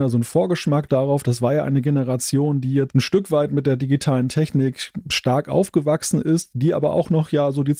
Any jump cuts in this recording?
yes; 1 cut; at 2.9 s

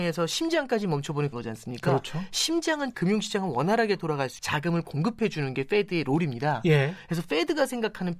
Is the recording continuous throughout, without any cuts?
no; 3 cuts; at 1.3 s, 2.9 s, 4.4 s

